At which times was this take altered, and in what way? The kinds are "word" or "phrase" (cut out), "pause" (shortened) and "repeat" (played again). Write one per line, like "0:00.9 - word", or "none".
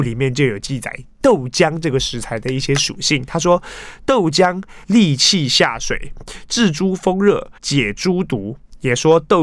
0:04.8 - pause
0:07.6 - pause